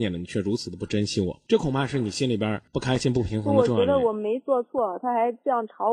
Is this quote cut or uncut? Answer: cut